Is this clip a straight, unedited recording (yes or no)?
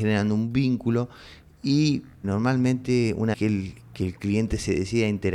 no